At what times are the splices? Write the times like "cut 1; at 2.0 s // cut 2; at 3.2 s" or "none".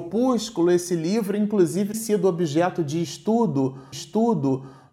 cut 1; at 1.9 s // cut 2; at 3.9 s